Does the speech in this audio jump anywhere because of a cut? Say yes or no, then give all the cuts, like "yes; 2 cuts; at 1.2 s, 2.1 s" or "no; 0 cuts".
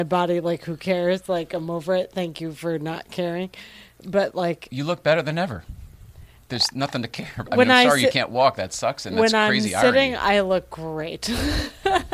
no; 0 cuts